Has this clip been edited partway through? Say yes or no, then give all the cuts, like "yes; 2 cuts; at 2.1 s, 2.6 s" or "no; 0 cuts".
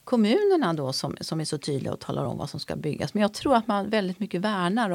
no; 0 cuts